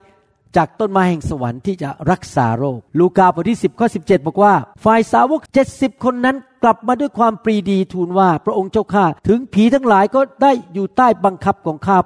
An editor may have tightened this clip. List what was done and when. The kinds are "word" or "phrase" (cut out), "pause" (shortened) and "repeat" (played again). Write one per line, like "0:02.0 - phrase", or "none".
0:02.9 - pause
0:04.7 - pause
0:05.5 - pause
0:09.2 - pause